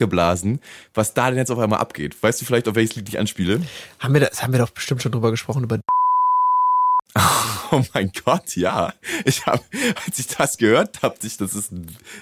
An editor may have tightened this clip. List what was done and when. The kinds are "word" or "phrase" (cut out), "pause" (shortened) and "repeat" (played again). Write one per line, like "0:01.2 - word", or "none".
0:11.2 - word